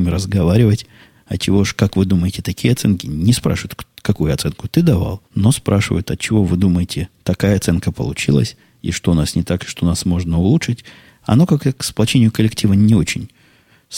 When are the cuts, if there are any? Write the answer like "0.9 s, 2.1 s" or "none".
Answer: 5.3 s